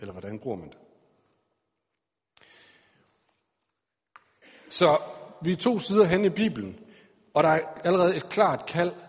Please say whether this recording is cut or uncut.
uncut